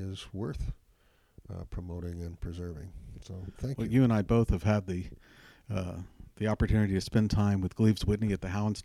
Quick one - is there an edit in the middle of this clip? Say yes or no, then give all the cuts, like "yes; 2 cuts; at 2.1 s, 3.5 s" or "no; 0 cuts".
no; 0 cuts